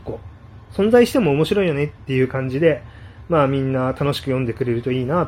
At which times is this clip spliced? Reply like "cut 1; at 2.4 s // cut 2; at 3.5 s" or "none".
none

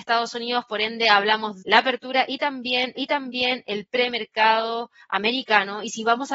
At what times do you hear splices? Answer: cut 1; at 1.6 s // cut 2; at 3.0 s

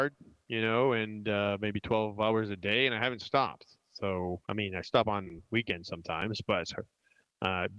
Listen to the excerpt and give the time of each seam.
cut 1; at 4.4 s

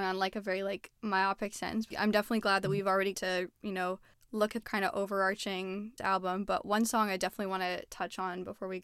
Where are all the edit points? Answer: cut 1; at 1.0 s // cut 2; at 1.9 s // cut 3; at 3.1 s // cut 4; at 4.1 s // cut 5; at 4.6 s // cut 6; at 6.0 s

